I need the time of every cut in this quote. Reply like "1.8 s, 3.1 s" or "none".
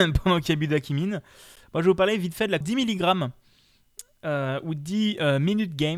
2.6 s